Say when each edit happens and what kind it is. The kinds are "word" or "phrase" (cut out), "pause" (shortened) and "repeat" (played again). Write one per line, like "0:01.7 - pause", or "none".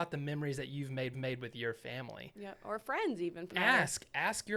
0:01.1 - repeat
0:03.5 - phrase

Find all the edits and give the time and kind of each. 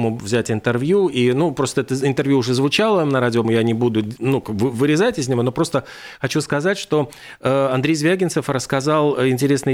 0:03.4 - word

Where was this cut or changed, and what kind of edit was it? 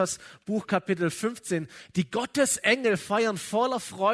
none

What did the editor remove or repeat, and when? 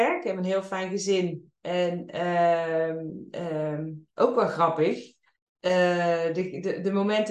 0:04.1 - pause
0:05.3 - pause

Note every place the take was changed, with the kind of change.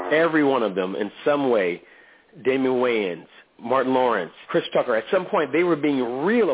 0:03.5 - word
0:04.4 - word

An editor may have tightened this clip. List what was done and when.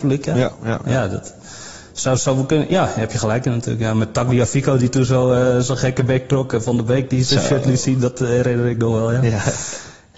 none

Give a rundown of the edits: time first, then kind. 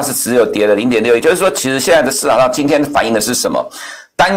0:01.2 - word

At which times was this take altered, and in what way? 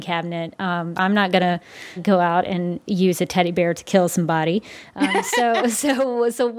0:00.9 - word
0:02.0 - word

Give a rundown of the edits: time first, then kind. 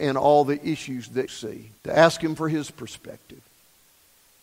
0:01.3 - word
0:01.8 - pause

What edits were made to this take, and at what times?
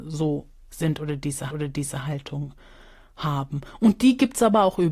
0:01.5 - repeat

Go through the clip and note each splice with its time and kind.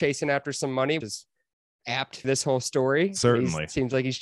0:01.0 - word
0:02.2 - word

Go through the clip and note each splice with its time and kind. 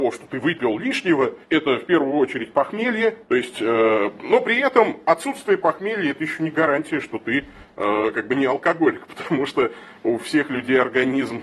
0:01.4 - pause
0:03.2 - pause

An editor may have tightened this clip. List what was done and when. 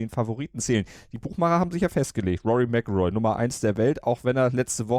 none

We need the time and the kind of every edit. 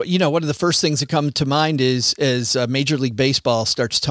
none

